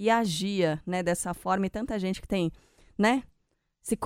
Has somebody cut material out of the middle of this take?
no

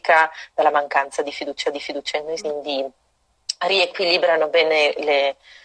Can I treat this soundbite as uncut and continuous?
no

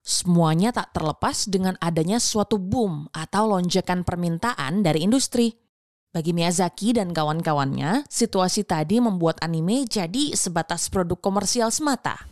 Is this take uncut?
yes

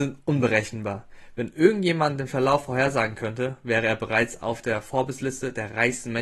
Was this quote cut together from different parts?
no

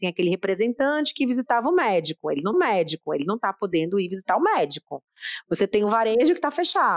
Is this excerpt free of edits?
no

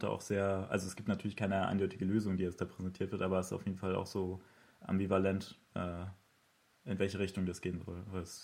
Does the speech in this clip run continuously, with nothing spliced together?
yes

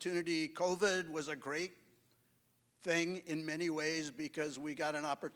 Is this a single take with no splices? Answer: yes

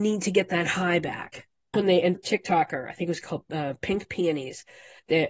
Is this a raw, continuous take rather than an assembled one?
no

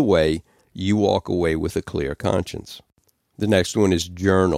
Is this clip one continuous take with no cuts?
yes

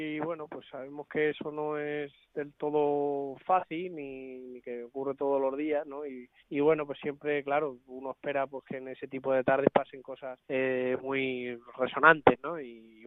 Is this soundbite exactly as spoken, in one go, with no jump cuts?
no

